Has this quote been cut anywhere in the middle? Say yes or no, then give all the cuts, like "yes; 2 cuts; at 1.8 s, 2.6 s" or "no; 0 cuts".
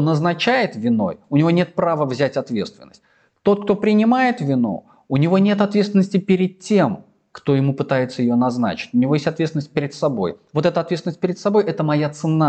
no; 0 cuts